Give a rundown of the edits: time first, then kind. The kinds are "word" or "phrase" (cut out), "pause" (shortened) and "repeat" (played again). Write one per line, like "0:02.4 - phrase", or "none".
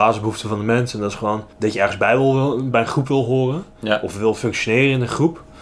0:01.5 - pause
0:02.7 - word